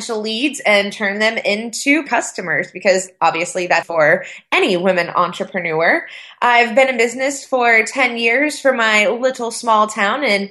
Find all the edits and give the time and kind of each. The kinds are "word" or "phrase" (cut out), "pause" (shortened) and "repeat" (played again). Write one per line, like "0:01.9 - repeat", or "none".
0:02.1 - word
0:03.8 - word

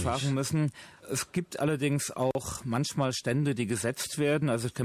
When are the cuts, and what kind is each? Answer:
0:01.0 - pause

